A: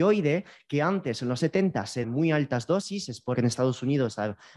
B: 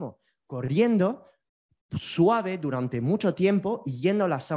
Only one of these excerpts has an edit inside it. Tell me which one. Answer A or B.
A